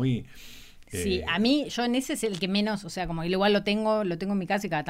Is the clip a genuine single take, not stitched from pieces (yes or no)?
yes